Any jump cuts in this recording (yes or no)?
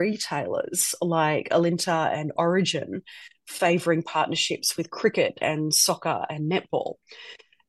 no